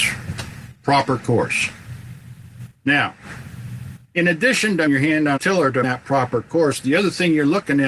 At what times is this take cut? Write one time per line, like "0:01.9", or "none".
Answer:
0:04.9
0:05.4
0:05.8

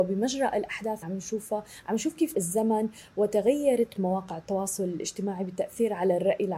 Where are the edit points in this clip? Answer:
0:01.0
0:02.3
0:04.0

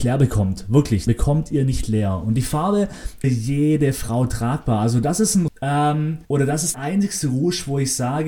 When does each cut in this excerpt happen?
0:01.1
0:03.2
0:05.5
0:06.2
0:06.7

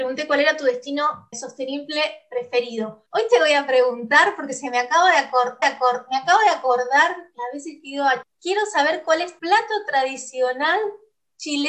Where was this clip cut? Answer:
0:01.3
0:03.1
0:05.6
0:08.2
0:09.4

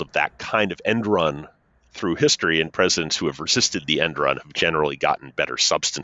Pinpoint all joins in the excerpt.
none

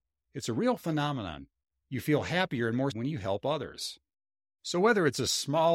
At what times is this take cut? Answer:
0:02.9

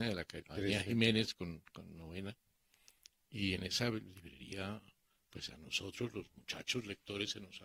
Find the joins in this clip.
none

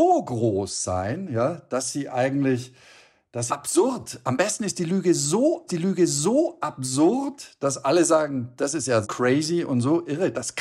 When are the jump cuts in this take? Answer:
0:03.5
0:05.7
0:09.0

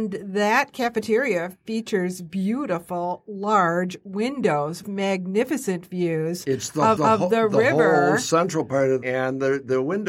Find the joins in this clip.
0:04.8
0:07.0
0:09.0

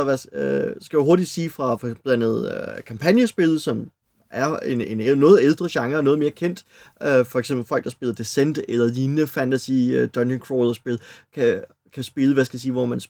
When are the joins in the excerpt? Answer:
none

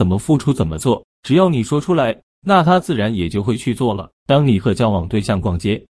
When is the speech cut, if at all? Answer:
0:04.2

